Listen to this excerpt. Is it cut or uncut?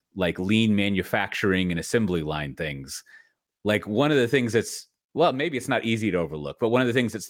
uncut